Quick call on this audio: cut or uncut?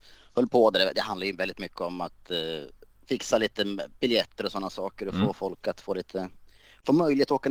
uncut